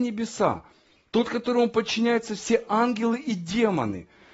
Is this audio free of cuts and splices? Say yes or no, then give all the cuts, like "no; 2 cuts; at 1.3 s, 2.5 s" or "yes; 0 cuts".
yes; 0 cuts